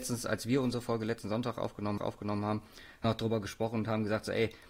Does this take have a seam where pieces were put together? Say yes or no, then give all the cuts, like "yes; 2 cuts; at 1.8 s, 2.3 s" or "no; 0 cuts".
yes; 2 cuts; at 2.0 s, 3.0 s